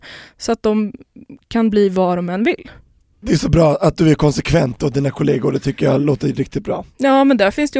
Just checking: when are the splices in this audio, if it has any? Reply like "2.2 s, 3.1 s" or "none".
none